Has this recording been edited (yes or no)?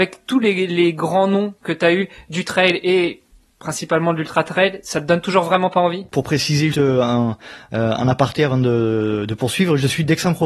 yes